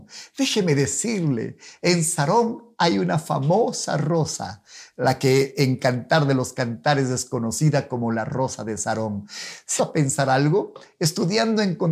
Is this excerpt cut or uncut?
cut